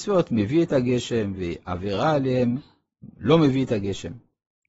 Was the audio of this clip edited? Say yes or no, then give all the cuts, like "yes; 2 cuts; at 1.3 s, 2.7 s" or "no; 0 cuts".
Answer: no; 0 cuts